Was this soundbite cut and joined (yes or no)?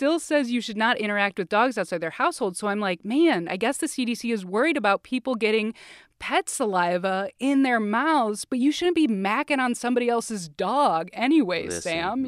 no